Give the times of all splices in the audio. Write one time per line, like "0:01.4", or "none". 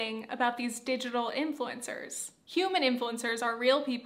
none